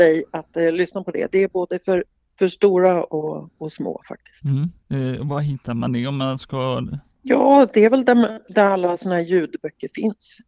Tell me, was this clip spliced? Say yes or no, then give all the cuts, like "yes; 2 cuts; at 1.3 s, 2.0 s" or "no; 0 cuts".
no; 0 cuts